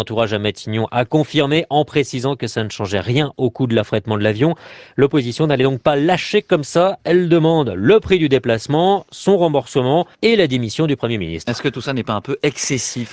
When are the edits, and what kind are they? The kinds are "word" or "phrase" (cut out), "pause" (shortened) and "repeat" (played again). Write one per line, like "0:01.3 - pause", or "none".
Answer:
0:10.1 - pause